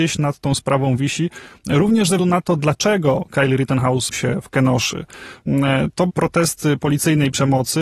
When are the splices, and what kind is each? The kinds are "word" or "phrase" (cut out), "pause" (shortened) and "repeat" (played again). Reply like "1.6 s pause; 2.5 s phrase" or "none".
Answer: 2.2 s word; 4.1 s word; 6.1 s word; 6.8 s word